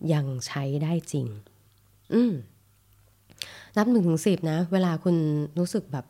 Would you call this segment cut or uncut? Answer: uncut